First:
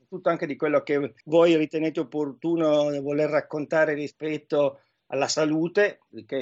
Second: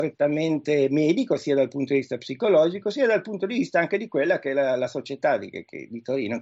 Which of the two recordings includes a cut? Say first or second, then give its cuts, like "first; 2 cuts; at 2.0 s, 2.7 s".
first; 1 cut; at 1.2 s